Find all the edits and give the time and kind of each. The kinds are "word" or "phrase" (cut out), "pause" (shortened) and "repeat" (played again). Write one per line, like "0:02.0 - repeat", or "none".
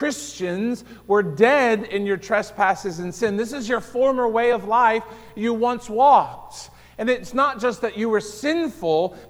none